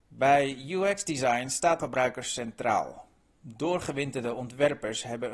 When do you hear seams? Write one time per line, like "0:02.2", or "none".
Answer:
0:01.8